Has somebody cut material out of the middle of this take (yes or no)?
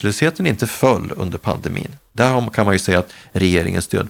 no